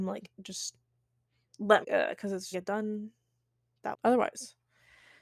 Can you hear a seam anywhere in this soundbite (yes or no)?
yes